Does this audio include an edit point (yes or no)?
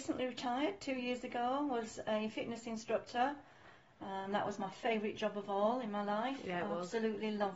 no